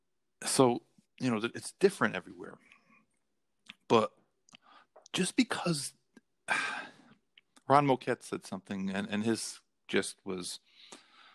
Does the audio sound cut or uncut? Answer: cut